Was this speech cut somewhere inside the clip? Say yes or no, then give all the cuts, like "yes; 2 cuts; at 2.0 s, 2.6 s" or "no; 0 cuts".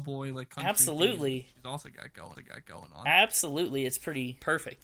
yes; 1 cut; at 2.3 s